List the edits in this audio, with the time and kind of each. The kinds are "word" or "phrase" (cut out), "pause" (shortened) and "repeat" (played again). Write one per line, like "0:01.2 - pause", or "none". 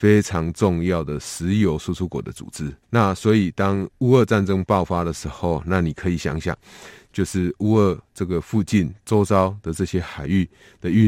0:02.8 - pause